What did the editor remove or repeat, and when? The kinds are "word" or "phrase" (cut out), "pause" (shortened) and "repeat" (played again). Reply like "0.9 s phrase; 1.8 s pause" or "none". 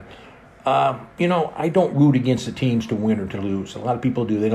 1.1 s pause